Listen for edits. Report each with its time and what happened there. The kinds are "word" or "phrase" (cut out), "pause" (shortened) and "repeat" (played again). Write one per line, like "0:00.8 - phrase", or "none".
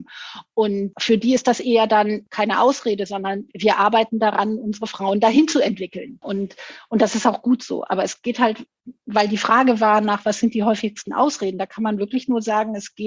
none